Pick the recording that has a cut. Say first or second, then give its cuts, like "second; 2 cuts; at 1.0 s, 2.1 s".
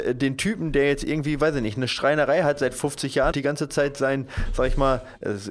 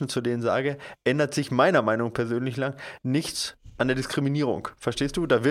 first; 1 cut; at 3.3 s